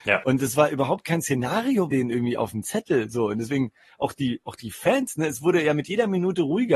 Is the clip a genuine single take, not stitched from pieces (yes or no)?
no